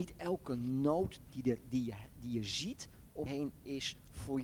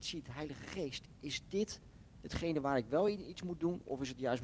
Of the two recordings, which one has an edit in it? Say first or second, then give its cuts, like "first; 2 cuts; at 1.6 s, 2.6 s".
first; 2 cuts; at 1.2 s, 3.3 s